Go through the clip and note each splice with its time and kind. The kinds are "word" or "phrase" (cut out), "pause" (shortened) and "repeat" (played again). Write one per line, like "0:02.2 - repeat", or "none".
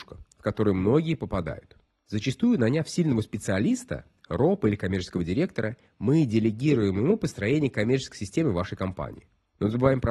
none